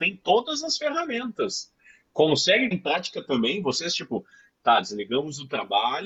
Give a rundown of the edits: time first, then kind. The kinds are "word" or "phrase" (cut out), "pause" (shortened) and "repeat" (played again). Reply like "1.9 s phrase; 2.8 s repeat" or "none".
2.7 s word